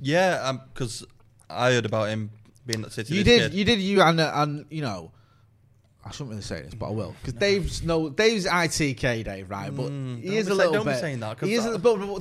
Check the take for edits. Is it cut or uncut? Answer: uncut